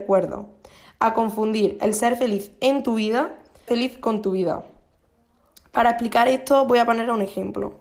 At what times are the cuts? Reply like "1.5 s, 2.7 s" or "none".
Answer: 3.7 s